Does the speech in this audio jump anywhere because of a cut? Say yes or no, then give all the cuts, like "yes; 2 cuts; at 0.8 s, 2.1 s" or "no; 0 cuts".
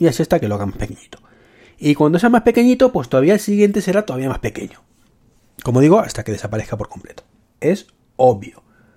no; 0 cuts